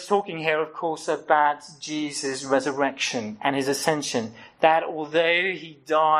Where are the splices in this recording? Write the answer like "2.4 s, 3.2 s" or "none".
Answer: none